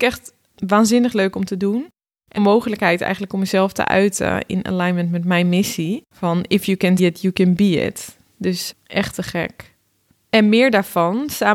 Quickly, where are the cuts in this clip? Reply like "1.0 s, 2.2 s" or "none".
2.4 s, 6.1 s, 7.0 s, 8.7 s

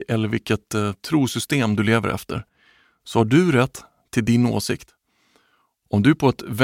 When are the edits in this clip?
none

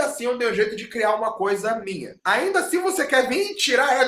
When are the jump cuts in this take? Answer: 2.2 s

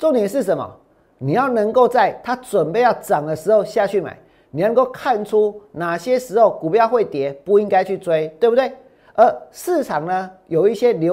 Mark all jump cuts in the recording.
none

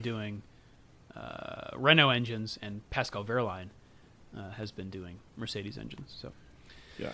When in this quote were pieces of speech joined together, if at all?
none

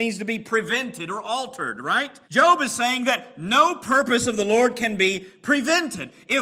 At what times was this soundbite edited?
2.2 s

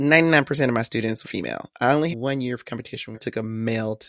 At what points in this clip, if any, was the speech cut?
1.2 s, 2.1 s, 3.1 s

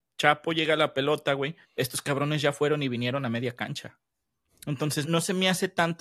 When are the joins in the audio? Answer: 1.6 s, 5.0 s

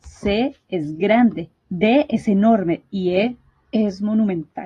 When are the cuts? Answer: 1.6 s

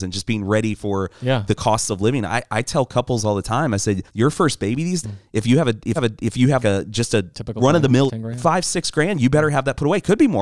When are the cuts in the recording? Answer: 4.1 s, 5.0 s, 6.0 s, 6.6 s, 7.3 s, 8.1 s

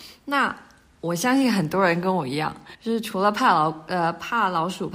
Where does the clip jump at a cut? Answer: 2.7 s

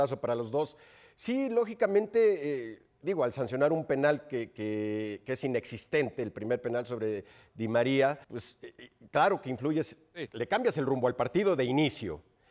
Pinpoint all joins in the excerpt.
8.2 s

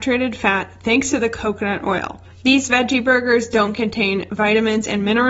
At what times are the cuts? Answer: 2.3 s

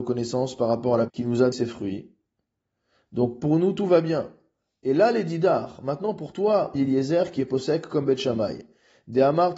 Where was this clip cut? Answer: 1.1 s, 1.5 s, 6.7 s

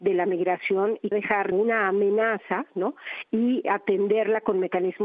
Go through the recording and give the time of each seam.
1.1 s, 1.5 s, 3.6 s

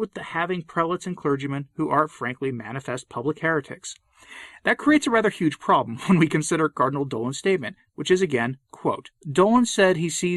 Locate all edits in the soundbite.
9.2 s

